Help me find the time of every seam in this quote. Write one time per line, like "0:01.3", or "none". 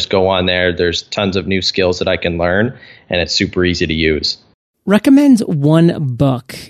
none

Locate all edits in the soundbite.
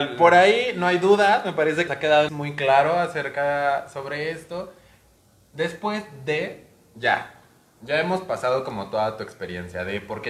0:01.9
0:02.3

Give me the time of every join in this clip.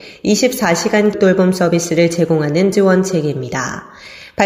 0:01.1
0:02.7

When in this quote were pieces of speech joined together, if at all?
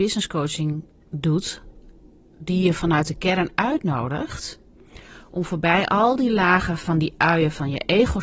none

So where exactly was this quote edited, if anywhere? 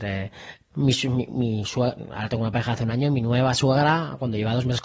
none

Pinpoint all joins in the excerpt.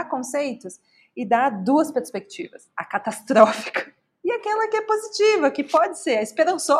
none

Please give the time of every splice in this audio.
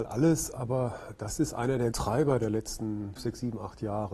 0:01.9
0:03.2

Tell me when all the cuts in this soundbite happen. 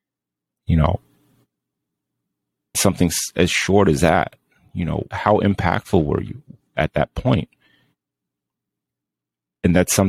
0:02.7
0:05.1

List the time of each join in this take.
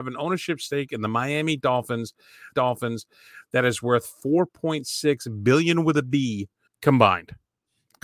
0:02.5
0:06.7

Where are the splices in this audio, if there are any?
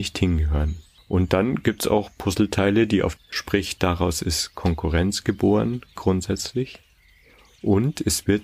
0:01.0
0:03.2

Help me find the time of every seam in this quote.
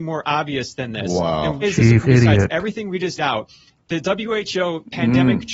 0:01.6
0:02.0
0:03.2

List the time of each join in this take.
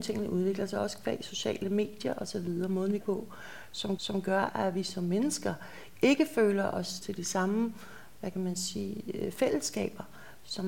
0:03.0
0:04.0
0:07.0

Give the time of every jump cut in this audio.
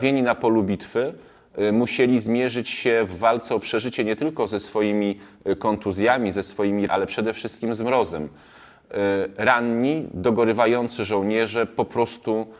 0:06.9

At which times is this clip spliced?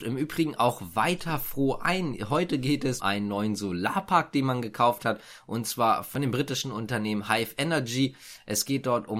0:03.0

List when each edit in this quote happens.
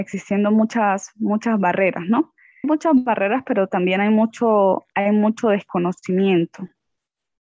0:02.6

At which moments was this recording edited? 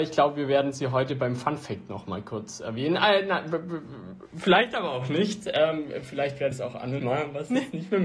0:06.5
0:07.0

